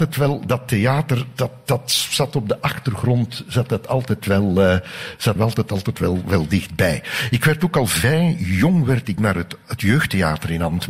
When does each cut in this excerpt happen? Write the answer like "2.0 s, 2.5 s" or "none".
5.4 s, 9.2 s